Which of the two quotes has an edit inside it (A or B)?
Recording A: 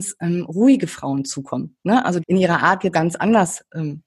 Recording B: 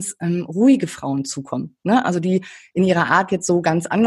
A